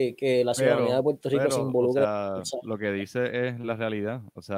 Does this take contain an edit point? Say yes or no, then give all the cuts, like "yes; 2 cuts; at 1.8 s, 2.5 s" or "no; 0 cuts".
no; 0 cuts